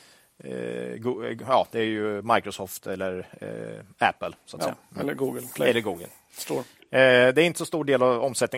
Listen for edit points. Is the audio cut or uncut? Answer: uncut